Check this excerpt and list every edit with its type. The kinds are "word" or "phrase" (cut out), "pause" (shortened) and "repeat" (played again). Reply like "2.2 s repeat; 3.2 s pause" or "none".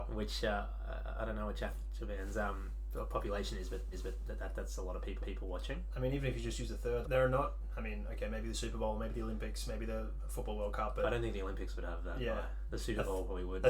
3.9 s repeat; 5.2 s repeat; 7.0 s word; 12.7 s phrase